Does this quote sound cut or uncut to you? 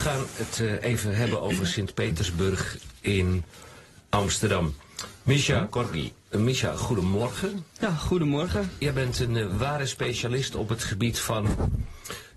uncut